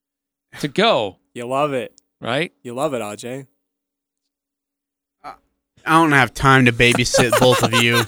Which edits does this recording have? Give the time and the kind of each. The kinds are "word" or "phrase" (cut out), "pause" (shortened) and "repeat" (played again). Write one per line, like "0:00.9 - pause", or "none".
none